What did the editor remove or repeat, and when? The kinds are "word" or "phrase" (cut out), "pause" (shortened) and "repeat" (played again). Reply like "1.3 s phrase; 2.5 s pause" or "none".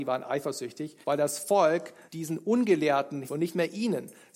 1.0 s pause; 2.1 s pause; 3.2 s word